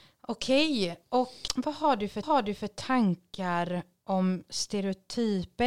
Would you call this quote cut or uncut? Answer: cut